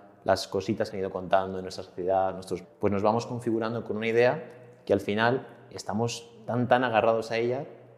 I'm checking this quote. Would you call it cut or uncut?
cut